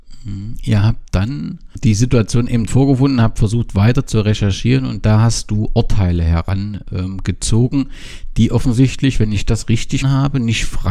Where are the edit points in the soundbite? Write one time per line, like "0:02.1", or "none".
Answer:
0:02.7
0:10.0